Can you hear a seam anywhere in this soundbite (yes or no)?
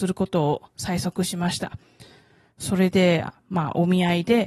no